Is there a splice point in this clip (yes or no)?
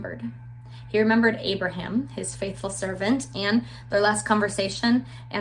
no